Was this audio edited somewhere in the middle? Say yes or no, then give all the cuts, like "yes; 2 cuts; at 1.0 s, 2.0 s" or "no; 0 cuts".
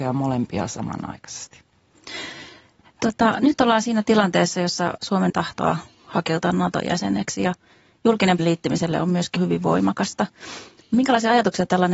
yes; 3 cuts; at 5.3 s, 8.4 s, 9.4 s